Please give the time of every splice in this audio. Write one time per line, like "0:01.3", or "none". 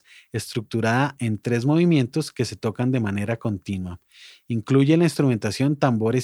none